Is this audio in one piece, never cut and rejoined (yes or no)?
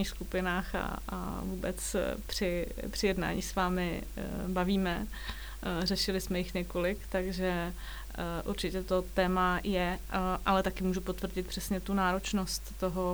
yes